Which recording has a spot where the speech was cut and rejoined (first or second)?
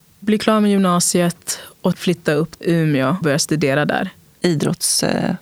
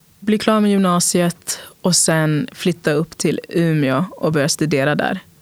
first